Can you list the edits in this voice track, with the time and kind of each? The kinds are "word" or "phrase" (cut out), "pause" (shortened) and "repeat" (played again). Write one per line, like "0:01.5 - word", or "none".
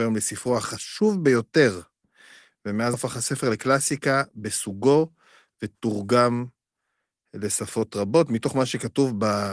0:02.9 - word